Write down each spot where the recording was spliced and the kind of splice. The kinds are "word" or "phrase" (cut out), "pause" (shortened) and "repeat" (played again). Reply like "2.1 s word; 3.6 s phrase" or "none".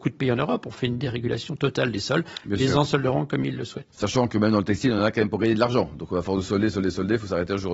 none